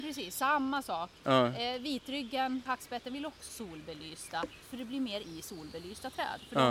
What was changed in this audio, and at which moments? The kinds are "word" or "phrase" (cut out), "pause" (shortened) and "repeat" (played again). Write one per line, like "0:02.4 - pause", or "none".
0:02.7 - word
0:03.5 - word
0:04.6 - word
0:05.2 - word